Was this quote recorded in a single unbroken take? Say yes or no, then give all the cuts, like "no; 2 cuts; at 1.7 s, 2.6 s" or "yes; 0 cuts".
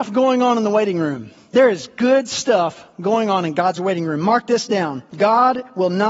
yes; 0 cuts